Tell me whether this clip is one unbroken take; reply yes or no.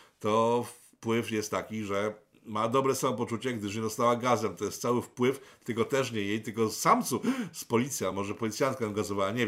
yes